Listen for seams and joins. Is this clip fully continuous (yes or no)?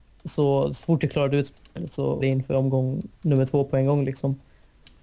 no